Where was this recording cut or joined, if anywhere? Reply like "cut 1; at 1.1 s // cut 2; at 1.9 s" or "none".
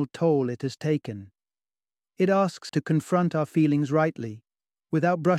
cut 1; at 2.7 s